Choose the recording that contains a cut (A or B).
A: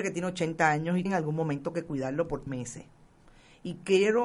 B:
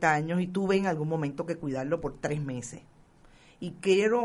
A